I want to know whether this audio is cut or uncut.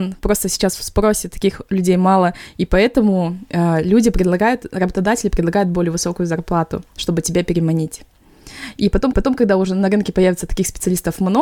cut